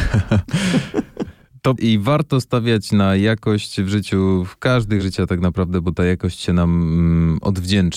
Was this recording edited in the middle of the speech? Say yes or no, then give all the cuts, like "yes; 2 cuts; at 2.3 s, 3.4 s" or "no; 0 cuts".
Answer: yes; 2 cuts; at 1.8 s, 5.0 s